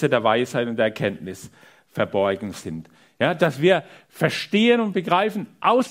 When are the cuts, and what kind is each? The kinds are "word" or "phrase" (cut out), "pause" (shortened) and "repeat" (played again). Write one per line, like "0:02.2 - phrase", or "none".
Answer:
none